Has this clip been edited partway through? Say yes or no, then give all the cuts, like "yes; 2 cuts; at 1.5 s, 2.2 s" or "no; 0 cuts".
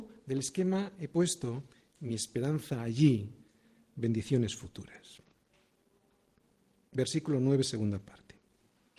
no; 0 cuts